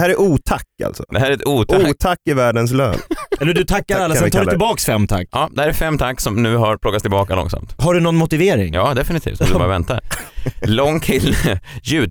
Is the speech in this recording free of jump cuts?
yes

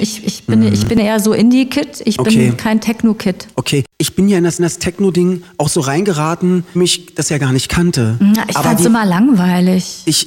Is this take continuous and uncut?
no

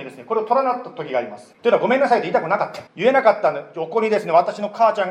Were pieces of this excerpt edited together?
yes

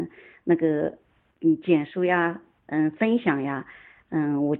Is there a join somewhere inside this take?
no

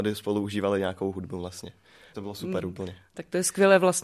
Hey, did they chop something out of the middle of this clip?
yes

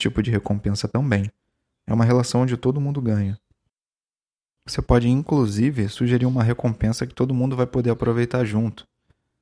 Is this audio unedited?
yes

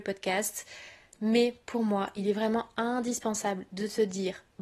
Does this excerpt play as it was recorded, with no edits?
yes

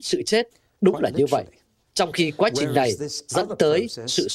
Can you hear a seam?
no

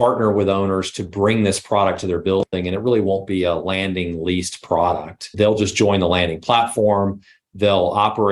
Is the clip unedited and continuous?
yes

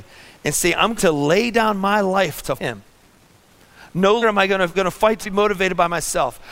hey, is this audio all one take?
no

